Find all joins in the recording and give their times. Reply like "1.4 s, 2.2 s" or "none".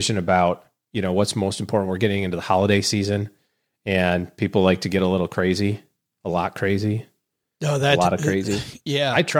none